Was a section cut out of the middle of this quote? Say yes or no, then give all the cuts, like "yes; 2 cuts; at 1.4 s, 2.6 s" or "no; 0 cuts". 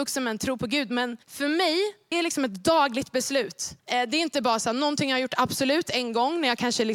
yes; 3 cuts; at 1.2 s, 2.1 s, 3.8 s